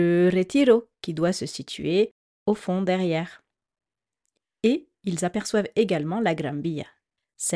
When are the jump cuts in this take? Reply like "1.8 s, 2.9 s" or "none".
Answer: none

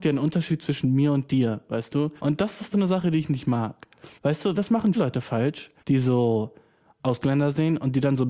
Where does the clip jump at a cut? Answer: 2.2 s, 2.7 s, 4.1 s, 4.5 s, 4.9 s, 5.8 s

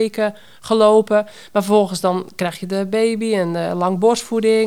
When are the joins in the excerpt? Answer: none

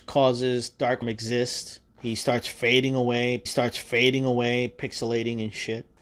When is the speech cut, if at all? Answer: 1.0 s, 1.9 s, 3.5 s

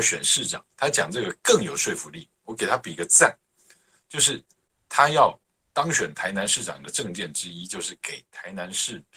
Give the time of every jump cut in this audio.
none

